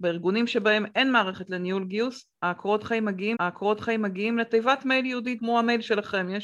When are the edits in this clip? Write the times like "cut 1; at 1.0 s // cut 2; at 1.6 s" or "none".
cut 1; at 3.3 s // cut 2; at 5.4 s

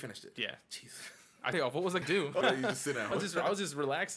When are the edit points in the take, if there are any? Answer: cut 1; at 1.5 s // cut 2; at 2.0 s // cut 3; at 2.4 s // cut 4; at 3.1 s

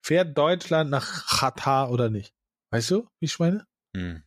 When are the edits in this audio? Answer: none

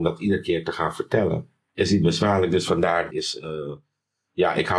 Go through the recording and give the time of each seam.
cut 1; at 1.7 s // cut 2; at 3.1 s

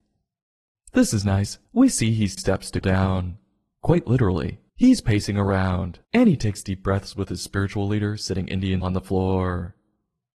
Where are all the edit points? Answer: cut 1; at 1.7 s // cut 2; at 2.4 s // cut 3; at 2.8 s // cut 4; at 4.7 s // cut 5; at 6.0 s // cut 6; at 8.8 s

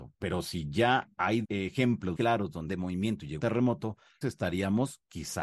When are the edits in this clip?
cut 1; at 1.4 s // cut 2; at 2.2 s // cut 3; at 2.7 s // cut 4; at 3.4 s // cut 5; at 4.2 s

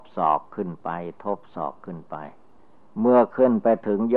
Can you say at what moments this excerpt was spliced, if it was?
cut 1; at 2.6 s

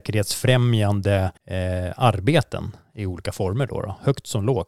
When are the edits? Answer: cut 1; at 1.4 s

